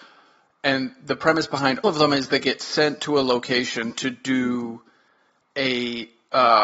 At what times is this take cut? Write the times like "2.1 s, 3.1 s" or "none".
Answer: 1.8 s